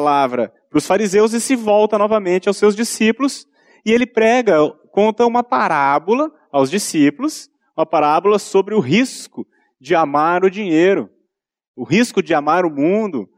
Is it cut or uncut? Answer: uncut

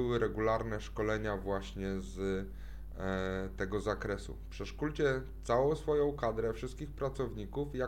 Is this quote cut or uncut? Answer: uncut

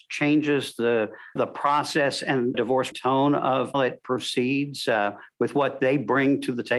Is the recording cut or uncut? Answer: cut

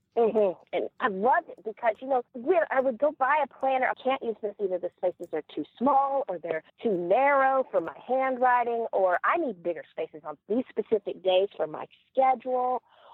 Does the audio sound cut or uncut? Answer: cut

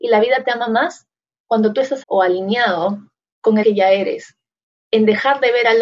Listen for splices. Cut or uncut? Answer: cut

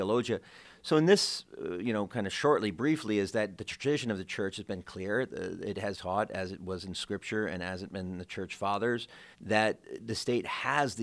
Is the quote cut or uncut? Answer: cut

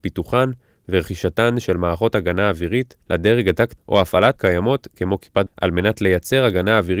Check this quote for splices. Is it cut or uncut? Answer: cut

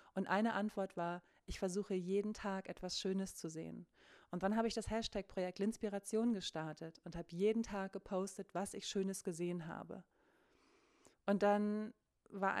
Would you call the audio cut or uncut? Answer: uncut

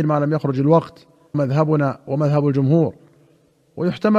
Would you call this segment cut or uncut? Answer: cut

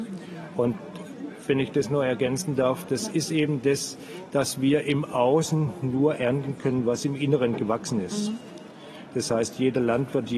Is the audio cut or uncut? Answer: uncut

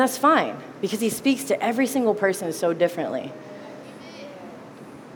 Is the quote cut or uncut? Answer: uncut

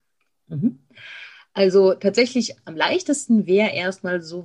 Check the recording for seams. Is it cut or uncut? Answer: uncut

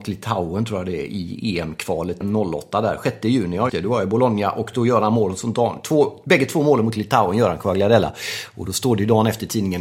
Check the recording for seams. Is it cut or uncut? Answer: cut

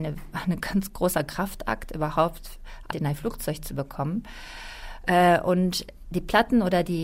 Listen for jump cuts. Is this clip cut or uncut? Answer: cut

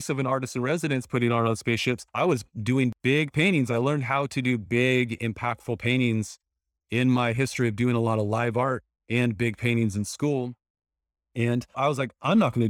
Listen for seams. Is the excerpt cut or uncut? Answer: cut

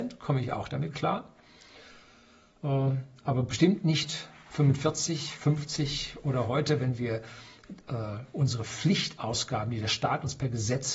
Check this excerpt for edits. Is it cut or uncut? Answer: uncut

